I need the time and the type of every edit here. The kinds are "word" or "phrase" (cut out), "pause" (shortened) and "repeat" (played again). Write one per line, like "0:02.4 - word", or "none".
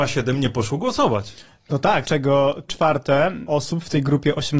0:02.0 - word
0:02.7 - word